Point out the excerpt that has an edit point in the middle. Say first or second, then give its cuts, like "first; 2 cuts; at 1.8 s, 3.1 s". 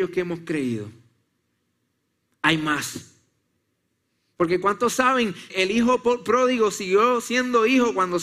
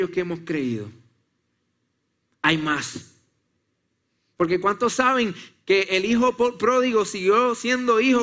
first; 1 cut; at 5.5 s